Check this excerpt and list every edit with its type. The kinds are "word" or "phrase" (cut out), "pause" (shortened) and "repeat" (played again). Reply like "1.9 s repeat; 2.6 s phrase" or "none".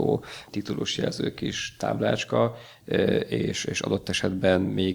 none